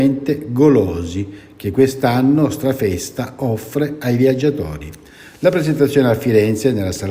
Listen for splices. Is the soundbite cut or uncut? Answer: uncut